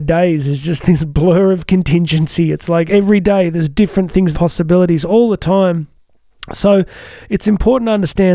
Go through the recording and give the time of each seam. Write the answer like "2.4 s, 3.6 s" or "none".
2.9 s, 4.3 s